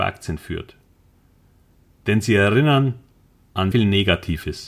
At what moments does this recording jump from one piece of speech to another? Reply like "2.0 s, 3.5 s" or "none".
3.7 s

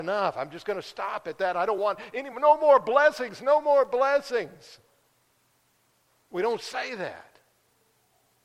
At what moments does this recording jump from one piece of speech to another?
none

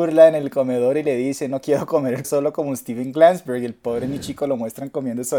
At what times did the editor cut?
2.2 s

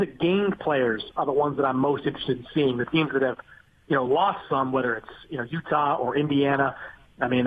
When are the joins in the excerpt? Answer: none

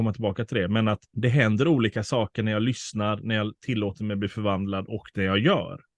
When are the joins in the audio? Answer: 1.1 s

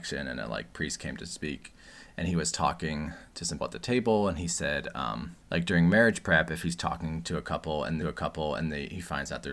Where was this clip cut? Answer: 3.6 s, 5.4 s, 8.0 s

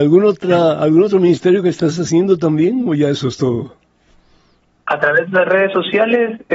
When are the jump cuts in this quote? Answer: none

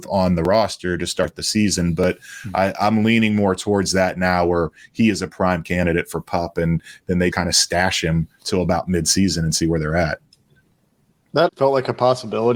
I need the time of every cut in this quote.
7.3 s, 11.5 s

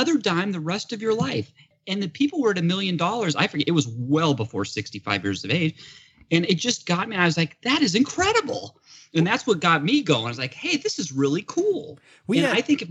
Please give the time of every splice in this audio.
none

